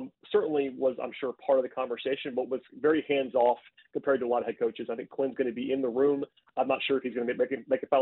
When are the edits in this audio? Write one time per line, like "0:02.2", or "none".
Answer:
none